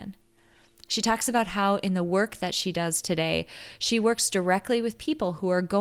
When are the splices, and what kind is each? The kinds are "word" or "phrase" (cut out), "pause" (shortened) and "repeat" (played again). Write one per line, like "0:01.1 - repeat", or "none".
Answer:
none

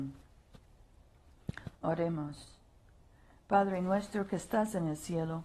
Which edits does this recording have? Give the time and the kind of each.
none

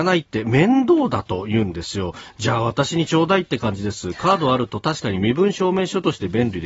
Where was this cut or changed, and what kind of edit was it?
none

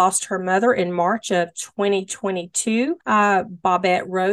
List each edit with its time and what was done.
0:03.0 - pause

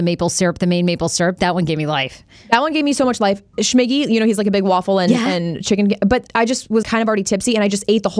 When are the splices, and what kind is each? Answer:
0:06.3 - word
0:06.8 - word

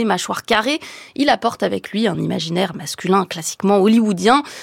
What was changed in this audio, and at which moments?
none

